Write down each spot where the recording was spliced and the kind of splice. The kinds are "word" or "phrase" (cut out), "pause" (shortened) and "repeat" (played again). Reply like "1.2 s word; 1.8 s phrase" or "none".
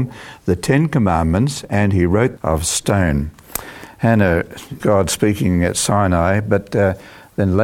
2.4 s phrase; 4.8 s word